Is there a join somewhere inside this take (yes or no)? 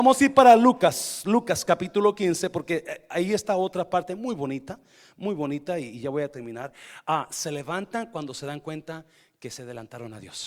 no